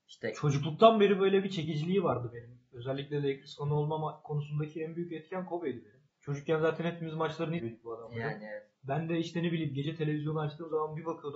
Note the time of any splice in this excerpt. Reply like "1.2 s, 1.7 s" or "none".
6.1 s, 7.6 s